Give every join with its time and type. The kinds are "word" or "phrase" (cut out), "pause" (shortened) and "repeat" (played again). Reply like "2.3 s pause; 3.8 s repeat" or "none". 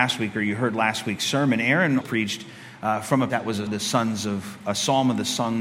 2.0 s word; 3.3 s word; 3.7 s word